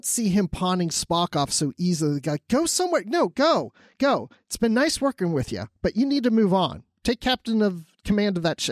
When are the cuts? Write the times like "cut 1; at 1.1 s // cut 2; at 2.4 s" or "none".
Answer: none